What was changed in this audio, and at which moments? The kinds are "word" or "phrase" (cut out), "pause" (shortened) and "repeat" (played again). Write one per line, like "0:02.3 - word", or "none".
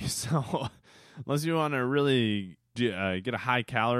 0:02.7 - word